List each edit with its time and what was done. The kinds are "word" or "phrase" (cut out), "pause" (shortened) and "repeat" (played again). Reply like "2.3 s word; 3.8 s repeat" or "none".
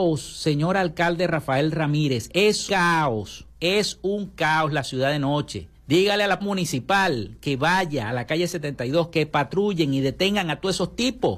2.7 s word; 5.8 s pause; 6.4 s word